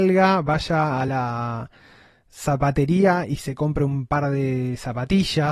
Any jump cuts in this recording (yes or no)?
no